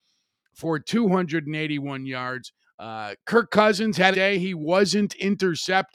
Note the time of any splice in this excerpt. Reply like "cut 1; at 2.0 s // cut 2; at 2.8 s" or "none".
cut 1; at 2.6 s // cut 2; at 4.1 s